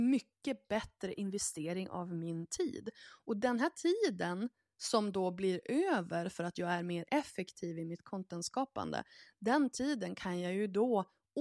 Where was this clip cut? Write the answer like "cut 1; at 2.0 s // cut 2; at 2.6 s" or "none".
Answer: none